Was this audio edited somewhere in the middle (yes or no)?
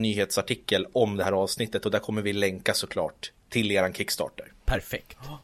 no